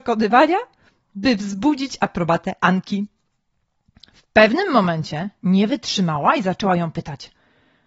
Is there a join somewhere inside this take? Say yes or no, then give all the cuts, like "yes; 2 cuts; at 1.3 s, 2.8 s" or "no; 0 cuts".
no; 0 cuts